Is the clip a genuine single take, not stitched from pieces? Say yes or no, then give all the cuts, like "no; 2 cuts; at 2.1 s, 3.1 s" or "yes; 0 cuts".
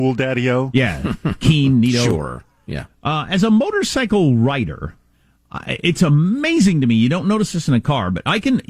yes; 0 cuts